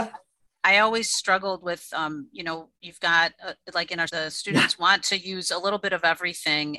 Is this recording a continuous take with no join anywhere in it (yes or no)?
no